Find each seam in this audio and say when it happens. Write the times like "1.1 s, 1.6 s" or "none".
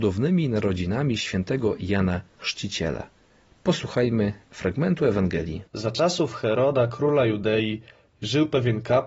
5.7 s